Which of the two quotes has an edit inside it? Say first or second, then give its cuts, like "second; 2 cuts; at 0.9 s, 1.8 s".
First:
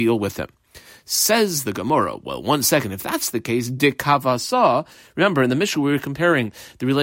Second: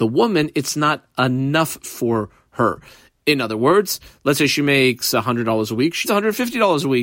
second; 1 cut; at 6.0 s